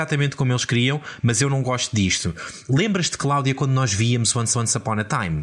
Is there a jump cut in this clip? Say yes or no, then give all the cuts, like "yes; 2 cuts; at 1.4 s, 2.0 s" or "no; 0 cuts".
yes; 1 cut; at 4.5 s